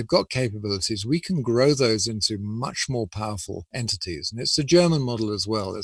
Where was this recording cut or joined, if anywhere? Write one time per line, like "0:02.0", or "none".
none